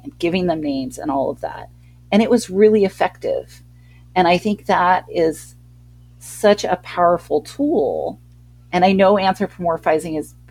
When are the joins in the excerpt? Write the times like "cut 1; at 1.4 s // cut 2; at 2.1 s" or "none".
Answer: none